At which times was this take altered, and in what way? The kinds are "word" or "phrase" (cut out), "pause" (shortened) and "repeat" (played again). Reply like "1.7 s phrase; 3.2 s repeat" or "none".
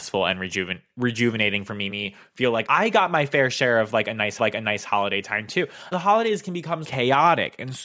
1.9 s word; 2.7 s word; 4.4 s repeat; 5.9 s phrase; 6.8 s word

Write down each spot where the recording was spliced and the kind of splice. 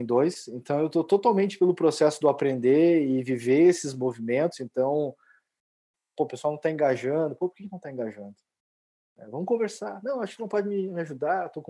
none

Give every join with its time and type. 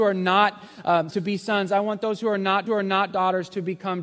1.1 s word; 2.7 s repeat

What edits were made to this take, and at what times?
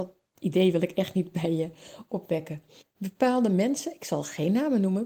2.8 s pause

